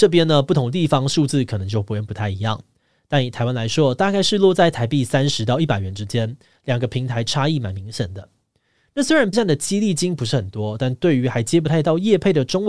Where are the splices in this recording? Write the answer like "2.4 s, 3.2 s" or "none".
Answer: 9.3 s